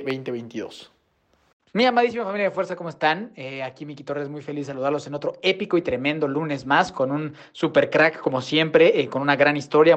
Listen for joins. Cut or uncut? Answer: uncut